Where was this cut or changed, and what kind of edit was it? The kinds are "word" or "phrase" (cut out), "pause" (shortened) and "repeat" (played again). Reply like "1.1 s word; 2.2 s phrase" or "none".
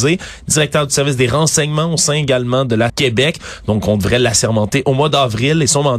2.9 s phrase